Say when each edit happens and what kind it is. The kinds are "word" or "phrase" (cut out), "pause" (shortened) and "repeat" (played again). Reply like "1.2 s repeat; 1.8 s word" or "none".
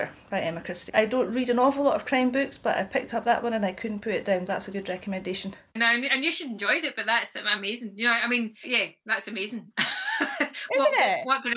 4.5 s word; 8.6 s word